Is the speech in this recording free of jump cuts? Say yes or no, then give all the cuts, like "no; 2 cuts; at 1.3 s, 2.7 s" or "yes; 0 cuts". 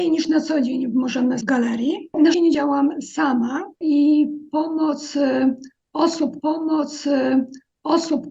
no; 3 cuts; at 1.4 s, 2.3 s, 6.4 s